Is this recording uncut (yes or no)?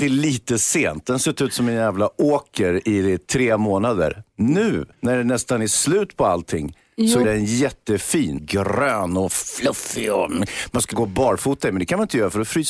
no